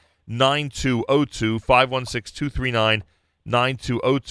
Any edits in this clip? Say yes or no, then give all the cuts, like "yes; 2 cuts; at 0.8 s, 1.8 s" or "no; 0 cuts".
no; 0 cuts